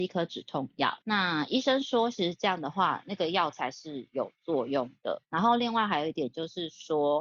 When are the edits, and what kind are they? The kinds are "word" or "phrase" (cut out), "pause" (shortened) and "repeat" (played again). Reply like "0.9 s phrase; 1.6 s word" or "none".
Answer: 1.0 s pause; 5.2 s pause